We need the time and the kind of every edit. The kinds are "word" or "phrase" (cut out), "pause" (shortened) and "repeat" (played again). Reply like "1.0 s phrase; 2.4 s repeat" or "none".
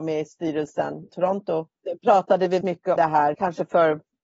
1.1 s word; 2.6 s word; 3.0 s word; 3.3 s word